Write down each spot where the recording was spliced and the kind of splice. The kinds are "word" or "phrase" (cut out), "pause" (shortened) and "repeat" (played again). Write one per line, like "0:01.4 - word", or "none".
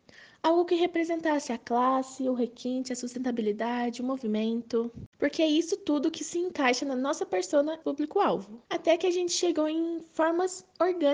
0:05.1 - pause
0:07.8 - phrase
0:08.7 - pause